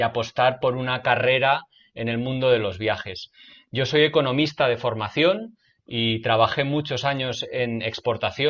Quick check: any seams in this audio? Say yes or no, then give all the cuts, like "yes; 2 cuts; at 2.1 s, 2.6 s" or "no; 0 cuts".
no; 0 cuts